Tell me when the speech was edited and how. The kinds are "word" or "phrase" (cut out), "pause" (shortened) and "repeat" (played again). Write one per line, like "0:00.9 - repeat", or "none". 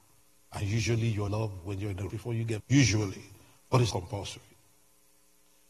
0:01.3 - word
0:02.1 - word
0:02.6 - word
0:03.9 - word